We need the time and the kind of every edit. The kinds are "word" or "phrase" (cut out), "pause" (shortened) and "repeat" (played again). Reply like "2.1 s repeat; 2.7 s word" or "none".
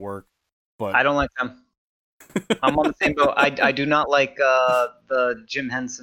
none